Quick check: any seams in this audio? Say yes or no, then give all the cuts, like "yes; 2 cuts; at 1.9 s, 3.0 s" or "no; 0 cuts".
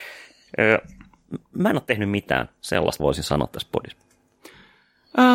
yes; 1 cut; at 3.0 s